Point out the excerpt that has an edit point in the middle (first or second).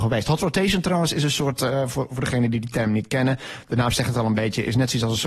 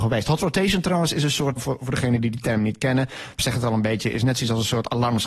second